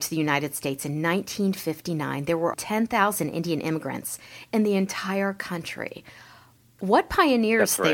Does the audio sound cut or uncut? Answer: cut